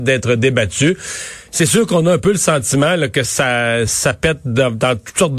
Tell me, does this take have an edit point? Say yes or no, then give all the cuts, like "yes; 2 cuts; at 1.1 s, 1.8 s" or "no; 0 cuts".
no; 0 cuts